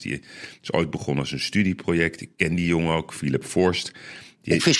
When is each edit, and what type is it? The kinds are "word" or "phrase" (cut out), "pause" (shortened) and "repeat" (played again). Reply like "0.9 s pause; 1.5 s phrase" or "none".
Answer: none